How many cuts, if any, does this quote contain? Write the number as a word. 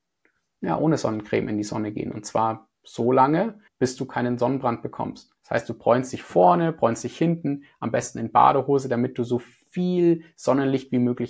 two